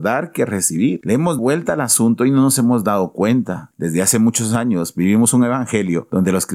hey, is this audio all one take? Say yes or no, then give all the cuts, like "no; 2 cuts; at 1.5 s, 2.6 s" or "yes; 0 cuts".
no; 1 cut; at 1.4 s